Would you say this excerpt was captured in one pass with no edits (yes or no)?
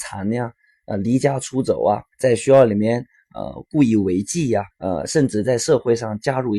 no